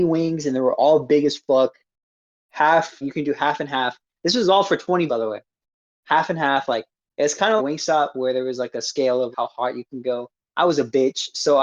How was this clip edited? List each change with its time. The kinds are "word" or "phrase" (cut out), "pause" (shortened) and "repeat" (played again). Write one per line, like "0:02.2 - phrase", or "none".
0:03.0 - word
0:05.1 - word
0:07.6 - word
0:09.3 - word